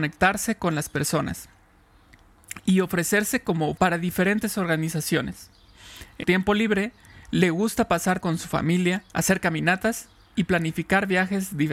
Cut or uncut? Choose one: cut